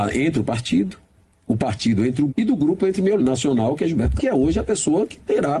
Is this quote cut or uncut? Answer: cut